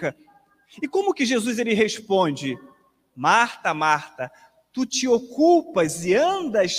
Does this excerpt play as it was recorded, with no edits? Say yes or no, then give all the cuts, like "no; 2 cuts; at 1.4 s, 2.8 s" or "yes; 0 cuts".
yes; 0 cuts